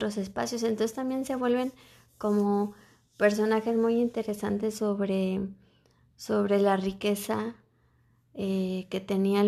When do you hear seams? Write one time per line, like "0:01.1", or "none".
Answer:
none

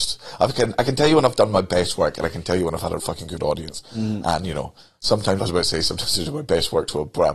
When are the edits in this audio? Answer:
0:03.0
0:05.4

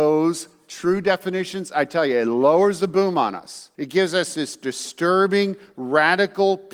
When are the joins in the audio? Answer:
0:03.7

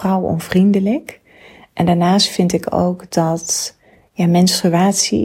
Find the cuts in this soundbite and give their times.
none

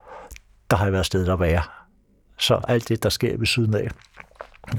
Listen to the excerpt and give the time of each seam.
0:02.6

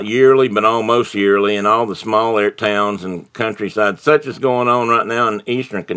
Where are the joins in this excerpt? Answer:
none

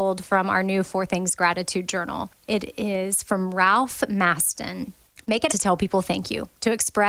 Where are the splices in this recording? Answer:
0:05.5

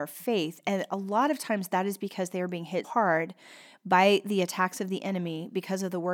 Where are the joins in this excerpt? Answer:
0:02.8

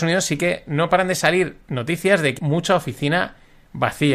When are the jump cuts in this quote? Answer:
0:01.6
0:02.4

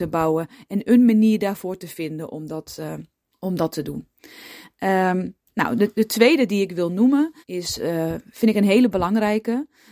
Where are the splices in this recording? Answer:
0:03.3
0:07.4

